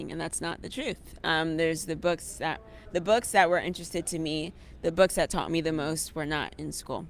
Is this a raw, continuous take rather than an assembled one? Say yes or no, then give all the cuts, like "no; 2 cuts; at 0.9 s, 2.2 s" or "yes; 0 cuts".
yes; 0 cuts